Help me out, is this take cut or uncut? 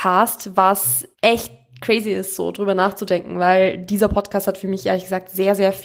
cut